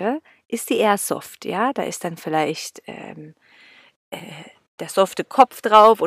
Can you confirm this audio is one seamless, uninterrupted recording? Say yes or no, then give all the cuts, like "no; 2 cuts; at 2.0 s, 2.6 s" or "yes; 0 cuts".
yes; 0 cuts